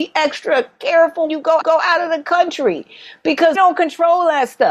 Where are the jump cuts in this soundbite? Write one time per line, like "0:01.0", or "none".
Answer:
0:01.3
0:01.6
0:03.5